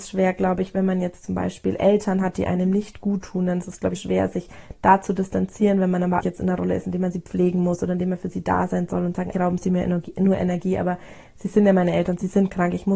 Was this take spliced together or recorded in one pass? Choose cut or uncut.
cut